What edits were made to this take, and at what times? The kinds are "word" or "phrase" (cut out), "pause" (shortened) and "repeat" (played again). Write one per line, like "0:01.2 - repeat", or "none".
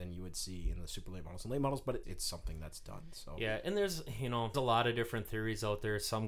0:02.0 - word
0:04.5 - word